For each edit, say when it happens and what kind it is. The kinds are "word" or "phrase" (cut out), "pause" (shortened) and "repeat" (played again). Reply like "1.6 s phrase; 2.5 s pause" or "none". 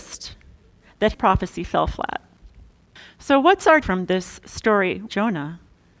1.1 s word; 3.0 s pause; 3.8 s word; 5.1 s word